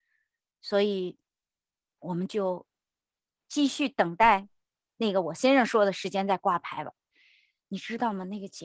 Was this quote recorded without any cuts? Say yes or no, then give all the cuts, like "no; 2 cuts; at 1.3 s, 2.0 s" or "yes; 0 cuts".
yes; 0 cuts